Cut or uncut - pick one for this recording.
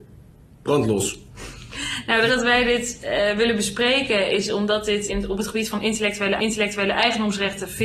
cut